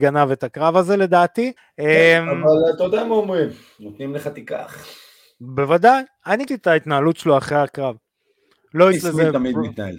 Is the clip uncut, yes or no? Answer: no